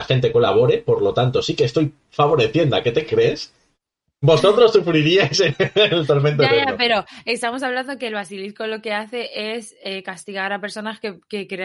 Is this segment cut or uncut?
uncut